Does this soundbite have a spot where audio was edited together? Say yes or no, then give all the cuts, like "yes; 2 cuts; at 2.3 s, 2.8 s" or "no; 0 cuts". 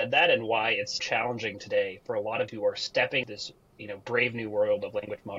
yes; 3 cuts; at 1.0 s, 2.5 s, 3.2 s